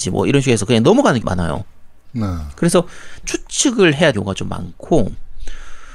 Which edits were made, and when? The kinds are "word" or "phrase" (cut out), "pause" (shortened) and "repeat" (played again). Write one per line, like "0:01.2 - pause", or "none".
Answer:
0:01.2 - word
0:03.2 - word
0:04.1 - word